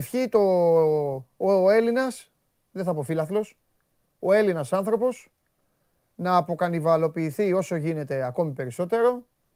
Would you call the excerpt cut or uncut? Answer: uncut